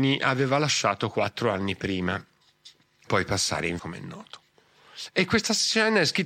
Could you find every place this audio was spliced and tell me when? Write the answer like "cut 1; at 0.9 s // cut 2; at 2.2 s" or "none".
cut 1; at 3.1 s // cut 2; at 3.8 s